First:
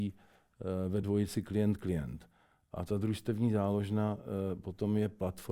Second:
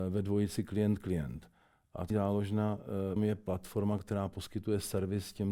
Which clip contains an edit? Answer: second; 2 cuts; at 2.1 s, 3.2 s

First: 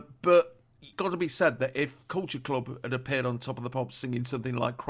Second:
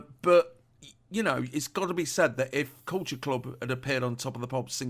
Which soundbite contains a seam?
first; 1 cut; at 0.9 s

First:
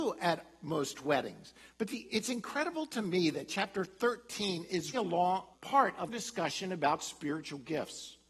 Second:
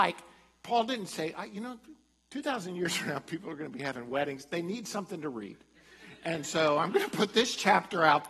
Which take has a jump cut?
first; 3 cuts; at 4.9 s, 5.5 s, 6.1 s

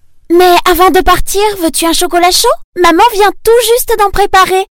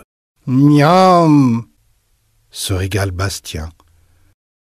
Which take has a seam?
first; 1 cut; at 2.7 s

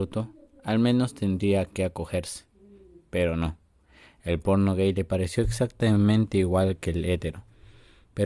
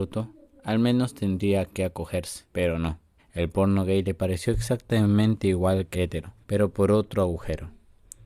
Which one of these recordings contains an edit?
second; 4 cuts; at 2.5 s, 3.2 s, 5.9 s, 6.4 s

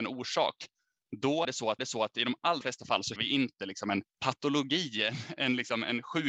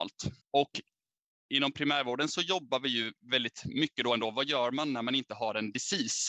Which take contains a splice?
first; 5 cuts; at 1.4 s, 1.8 s, 2.6 s, 3.2 s, 4.1 s

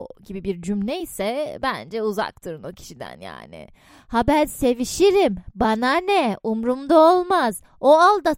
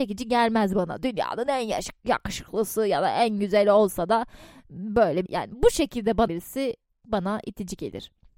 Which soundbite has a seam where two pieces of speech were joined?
second; 2 cuts; at 5.3 s, 6.3 s

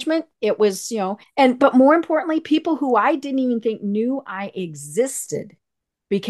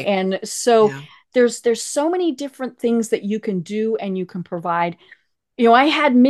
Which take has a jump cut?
first; 1 cut; at 1.2 s

